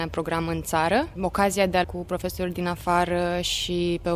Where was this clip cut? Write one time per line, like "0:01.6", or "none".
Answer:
0:01.8